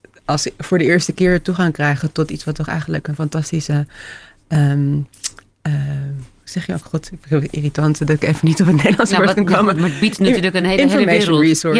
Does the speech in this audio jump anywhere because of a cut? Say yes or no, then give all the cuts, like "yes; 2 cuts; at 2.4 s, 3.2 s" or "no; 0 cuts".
no; 0 cuts